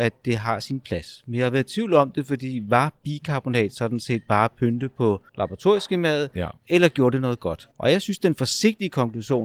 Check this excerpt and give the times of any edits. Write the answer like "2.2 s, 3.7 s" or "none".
5.3 s, 7.7 s